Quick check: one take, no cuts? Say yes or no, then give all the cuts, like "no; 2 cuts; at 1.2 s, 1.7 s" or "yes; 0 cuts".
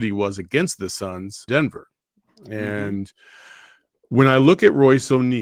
no; 1 cut; at 1.5 s